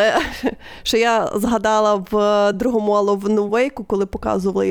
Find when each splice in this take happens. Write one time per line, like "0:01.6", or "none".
none